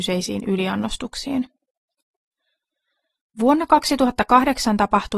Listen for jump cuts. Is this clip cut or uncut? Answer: uncut